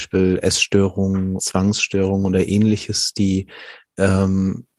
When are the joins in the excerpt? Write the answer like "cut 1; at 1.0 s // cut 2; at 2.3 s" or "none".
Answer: cut 1; at 1.4 s